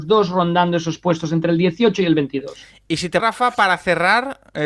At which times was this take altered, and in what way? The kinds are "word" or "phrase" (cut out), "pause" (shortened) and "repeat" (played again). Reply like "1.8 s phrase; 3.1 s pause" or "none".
3.2 s word